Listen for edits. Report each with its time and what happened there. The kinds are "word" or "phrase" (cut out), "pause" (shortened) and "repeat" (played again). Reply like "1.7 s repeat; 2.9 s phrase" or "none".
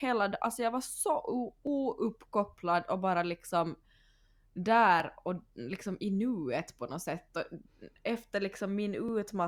none